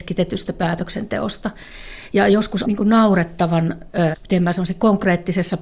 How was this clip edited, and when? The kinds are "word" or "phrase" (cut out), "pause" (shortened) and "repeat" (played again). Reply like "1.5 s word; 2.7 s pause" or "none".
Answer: 2.6 s word; 4.1 s word